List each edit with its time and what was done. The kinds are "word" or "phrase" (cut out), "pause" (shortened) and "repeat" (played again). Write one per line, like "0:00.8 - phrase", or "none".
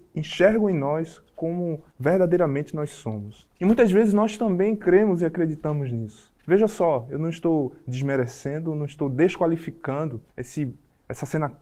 0:01.9 - pause
0:03.5 - pause
0:06.4 - pause
0:10.3 - pause